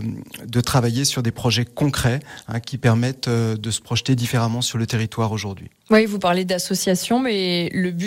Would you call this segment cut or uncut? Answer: uncut